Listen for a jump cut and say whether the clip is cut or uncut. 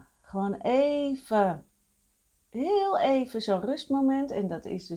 uncut